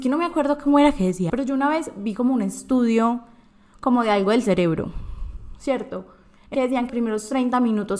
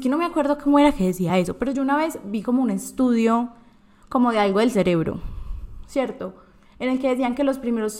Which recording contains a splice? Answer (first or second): first